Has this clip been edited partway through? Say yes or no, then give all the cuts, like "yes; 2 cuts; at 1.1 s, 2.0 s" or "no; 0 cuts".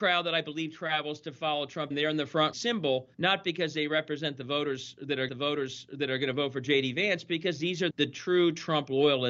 yes; 5 cuts; at 1.9 s, 2.5 s, 3.1 s, 5.3 s, 7.9 s